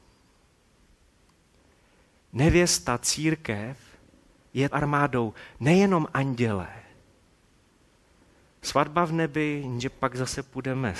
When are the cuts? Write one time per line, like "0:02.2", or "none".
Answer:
0:04.7